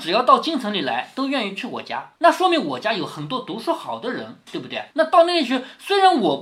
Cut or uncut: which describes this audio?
cut